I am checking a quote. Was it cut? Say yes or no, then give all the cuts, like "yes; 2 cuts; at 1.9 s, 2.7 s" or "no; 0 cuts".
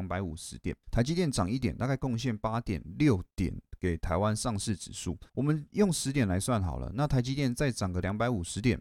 yes; 1 cut; at 5.3 s